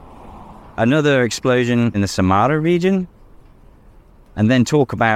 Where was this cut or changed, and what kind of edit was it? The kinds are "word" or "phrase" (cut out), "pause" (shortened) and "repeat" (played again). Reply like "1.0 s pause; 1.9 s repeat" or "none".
1.9 s phrase